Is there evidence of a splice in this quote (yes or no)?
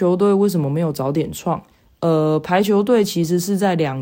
no